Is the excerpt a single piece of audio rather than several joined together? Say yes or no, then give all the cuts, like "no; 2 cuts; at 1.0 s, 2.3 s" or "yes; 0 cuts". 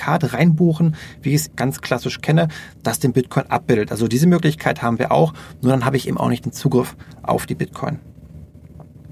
no; 1 cut; at 1.5 s